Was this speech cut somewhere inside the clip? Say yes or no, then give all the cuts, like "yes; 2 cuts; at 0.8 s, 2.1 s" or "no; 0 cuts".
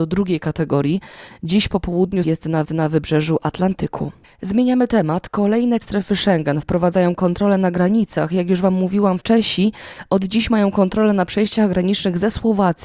yes; 5 cuts; at 2.2 s, 2.6 s, 4.2 s, 5.8 s, 9.2 s